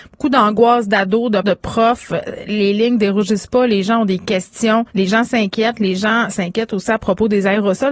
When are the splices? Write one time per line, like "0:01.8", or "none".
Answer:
0:01.4
0:04.9